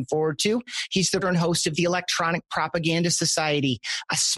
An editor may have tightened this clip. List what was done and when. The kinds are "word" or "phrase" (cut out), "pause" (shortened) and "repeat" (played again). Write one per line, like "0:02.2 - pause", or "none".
0:01.2 - word